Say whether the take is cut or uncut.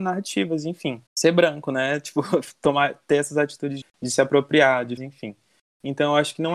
cut